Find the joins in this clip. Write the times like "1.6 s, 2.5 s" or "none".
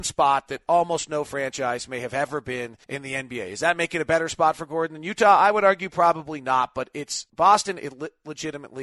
2.8 s, 7.3 s